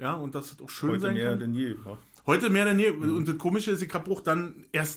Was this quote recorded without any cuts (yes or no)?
yes